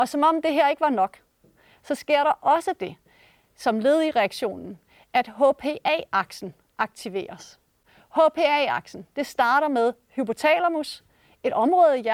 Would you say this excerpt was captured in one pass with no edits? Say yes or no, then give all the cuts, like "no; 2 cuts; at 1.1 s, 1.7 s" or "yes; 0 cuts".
yes; 0 cuts